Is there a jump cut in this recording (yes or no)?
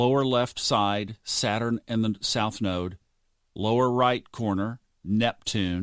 no